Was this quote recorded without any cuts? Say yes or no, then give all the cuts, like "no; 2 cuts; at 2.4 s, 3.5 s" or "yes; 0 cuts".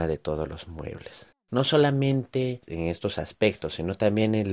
no; 1 cut; at 1.3 s